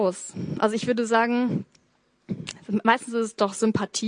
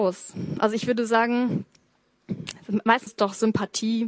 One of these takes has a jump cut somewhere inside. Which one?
second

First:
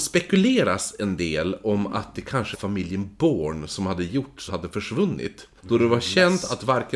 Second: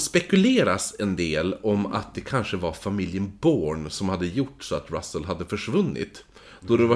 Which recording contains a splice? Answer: first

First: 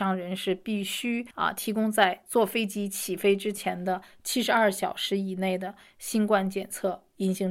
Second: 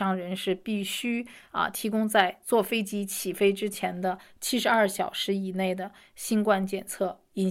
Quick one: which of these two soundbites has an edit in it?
first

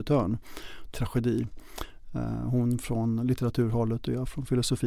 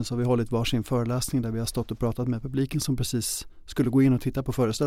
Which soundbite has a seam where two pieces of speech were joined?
first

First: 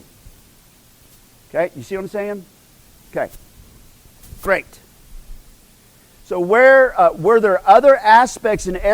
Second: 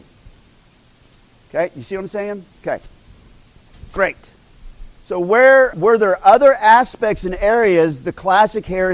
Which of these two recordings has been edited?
second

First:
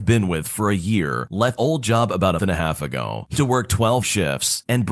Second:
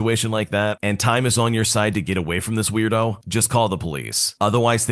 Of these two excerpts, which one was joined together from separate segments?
first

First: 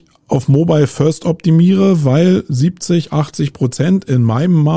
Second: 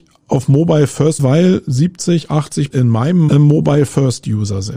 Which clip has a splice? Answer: second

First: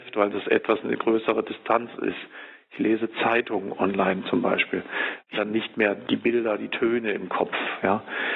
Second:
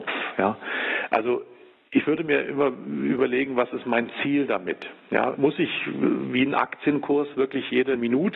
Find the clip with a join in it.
first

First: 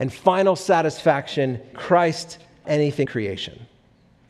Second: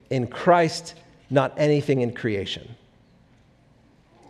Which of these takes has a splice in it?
first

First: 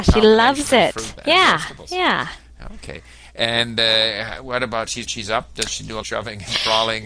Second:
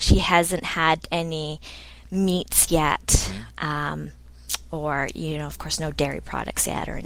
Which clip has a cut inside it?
first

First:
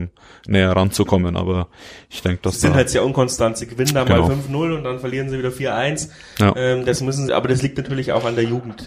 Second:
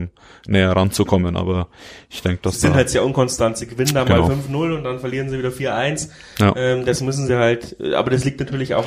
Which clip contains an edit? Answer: first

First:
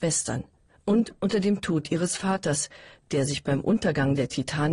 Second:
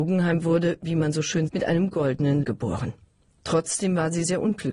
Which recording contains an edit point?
second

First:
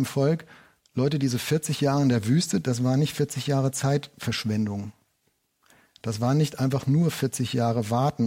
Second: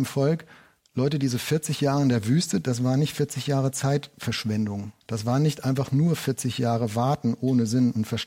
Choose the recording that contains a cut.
second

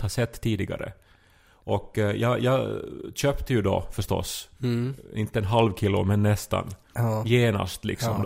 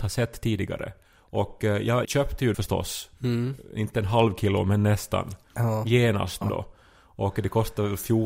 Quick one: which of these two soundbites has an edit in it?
second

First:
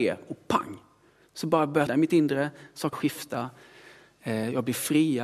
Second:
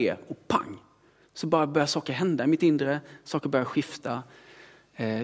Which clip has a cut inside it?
first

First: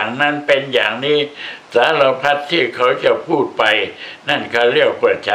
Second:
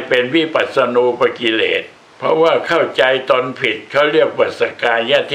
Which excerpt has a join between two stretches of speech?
second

